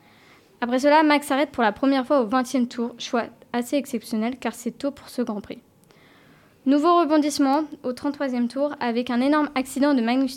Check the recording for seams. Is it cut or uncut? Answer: uncut